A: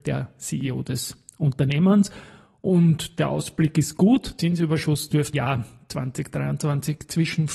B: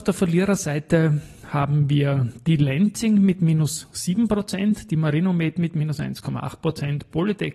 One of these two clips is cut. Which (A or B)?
A